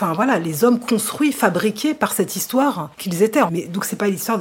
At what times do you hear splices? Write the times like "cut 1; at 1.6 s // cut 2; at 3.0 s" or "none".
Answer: cut 1; at 2.9 s